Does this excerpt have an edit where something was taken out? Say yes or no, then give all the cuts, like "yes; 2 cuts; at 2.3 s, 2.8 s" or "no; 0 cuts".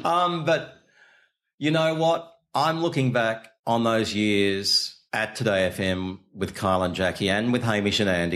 yes; 2 cuts; at 3.6 s, 5.1 s